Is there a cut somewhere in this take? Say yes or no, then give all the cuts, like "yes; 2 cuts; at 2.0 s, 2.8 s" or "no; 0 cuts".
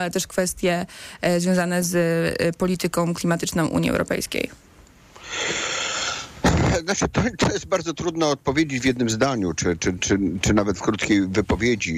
no; 0 cuts